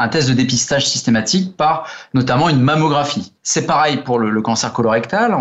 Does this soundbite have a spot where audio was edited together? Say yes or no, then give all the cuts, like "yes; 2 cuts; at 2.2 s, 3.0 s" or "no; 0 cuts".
yes; 1 cut; at 3.4 s